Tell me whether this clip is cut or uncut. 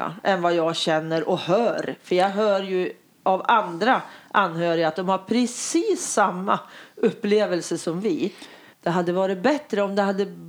uncut